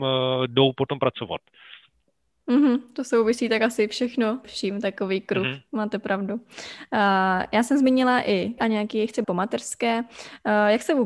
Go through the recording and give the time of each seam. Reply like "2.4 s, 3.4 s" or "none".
4.4 s, 8.6 s, 9.2 s